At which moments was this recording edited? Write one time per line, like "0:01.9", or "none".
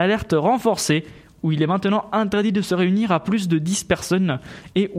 none